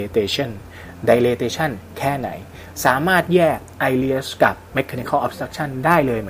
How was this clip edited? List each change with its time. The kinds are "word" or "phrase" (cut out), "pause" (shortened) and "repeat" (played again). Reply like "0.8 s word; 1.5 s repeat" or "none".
none